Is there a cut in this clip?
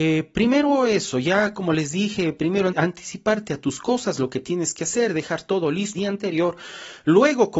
yes; 2 cuts; at 2.7 s, 5.9 s

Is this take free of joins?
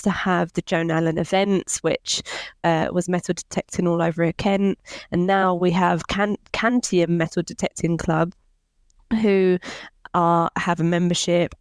yes; 0 cuts

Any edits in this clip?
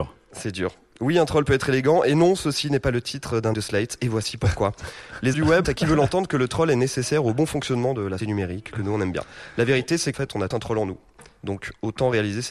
yes; 6 cuts; at 3.5 s, 5.3 s, 5.6 s, 8.2 s, 10.1 s, 10.5 s

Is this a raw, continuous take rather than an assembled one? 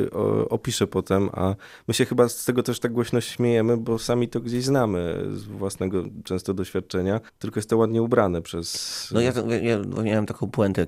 yes; 0 cuts

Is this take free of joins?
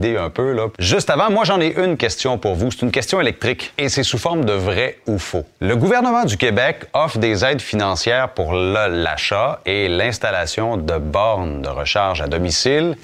yes; 0 cuts

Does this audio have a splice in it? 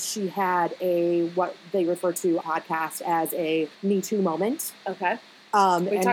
yes; 2 cuts; at 2.4 s, 3.7 s

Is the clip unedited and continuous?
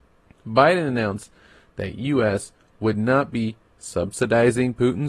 yes; 0 cuts

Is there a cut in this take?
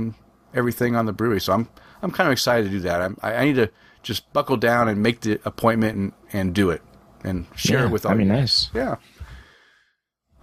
no; 0 cuts

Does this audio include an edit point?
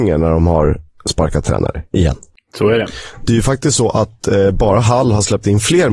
no; 0 cuts

